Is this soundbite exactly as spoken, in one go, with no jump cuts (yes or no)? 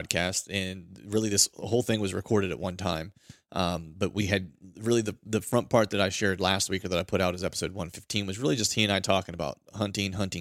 yes